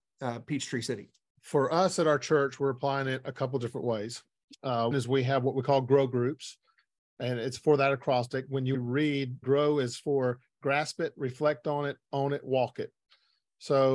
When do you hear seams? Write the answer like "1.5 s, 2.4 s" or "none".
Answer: 1.4 s, 4.9 s, 8.7 s, 9.4 s